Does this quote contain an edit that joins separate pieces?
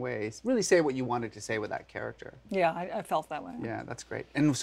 no; 0 cuts

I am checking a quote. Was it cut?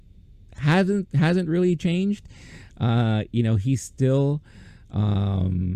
no; 0 cuts

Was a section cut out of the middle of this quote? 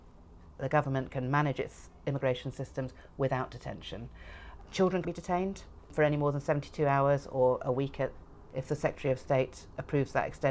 yes; 1 cut; at 5.0 s

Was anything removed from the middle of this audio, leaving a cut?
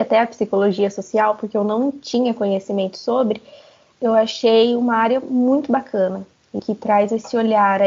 yes; 1 cut; at 6.6 s

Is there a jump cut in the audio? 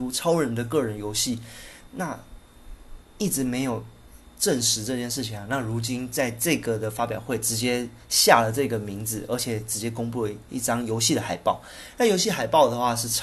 yes; 1 cut; at 4.3 s

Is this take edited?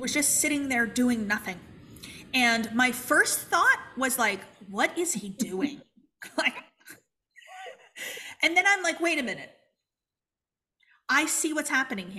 no; 0 cuts

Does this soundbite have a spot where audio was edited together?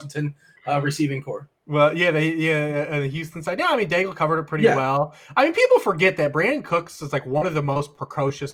yes; 1 cut; at 1.6 s

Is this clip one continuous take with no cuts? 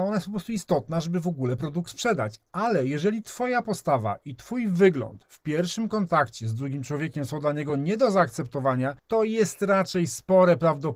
yes; 0 cuts

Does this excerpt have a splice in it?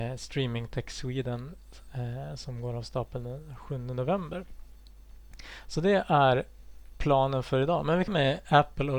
yes; 1 cut; at 8.1 s

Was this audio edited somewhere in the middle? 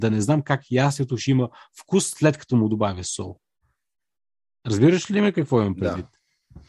no; 0 cuts

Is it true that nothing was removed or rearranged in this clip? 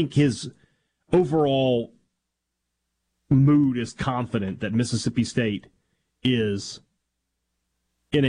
yes; 0 cuts

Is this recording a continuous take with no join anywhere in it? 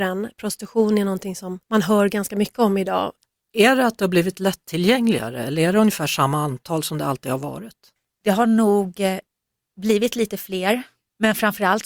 no; 1 cut; at 1.6 s

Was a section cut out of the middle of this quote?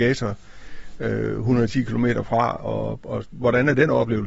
no; 0 cuts

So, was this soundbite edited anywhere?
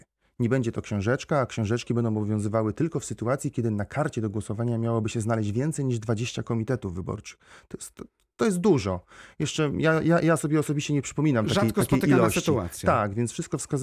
no; 0 cuts

